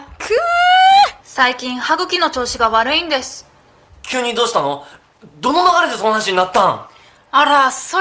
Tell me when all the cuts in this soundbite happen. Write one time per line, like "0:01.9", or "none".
0:01.2

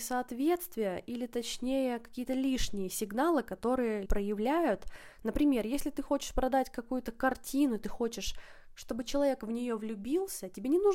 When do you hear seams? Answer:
0:04.1

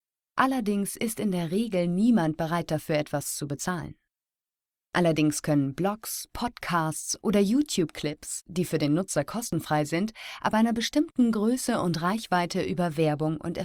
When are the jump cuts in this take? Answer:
none

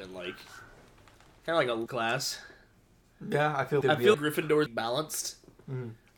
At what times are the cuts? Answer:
0:01.9
0:03.8
0:04.1
0:04.7

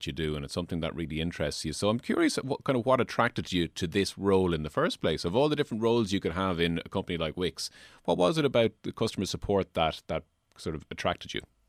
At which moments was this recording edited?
none

